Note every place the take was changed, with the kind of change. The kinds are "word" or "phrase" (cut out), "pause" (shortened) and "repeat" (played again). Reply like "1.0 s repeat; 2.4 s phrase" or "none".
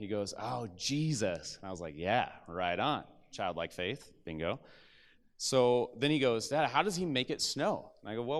none

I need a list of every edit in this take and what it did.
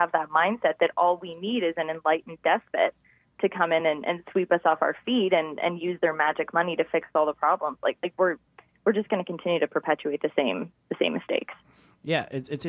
none

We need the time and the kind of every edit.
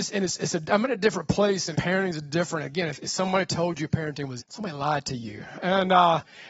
1.7 s word; 4.4 s word

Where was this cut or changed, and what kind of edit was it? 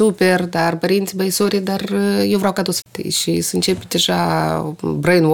2.8 s phrase

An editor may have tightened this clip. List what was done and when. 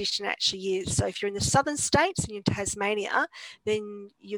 none

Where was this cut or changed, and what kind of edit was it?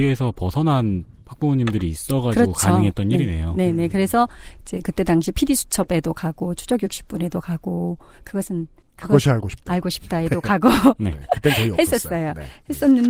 8.8 s pause

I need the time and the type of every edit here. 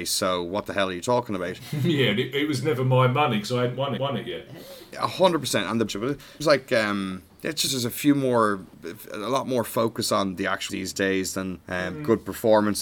4.0 s repeat; 5.9 s phrase; 6.4 s word; 7.7 s word; 8.7 s pause; 10.7 s word; 11.6 s pause

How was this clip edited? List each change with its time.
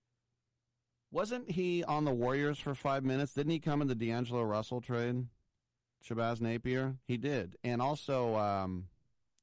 none

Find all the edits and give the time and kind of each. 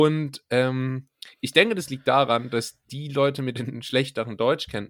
none

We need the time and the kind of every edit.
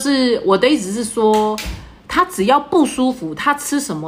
2.0 s pause

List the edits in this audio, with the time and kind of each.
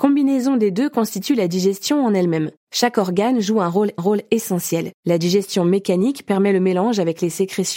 4.0 s repeat

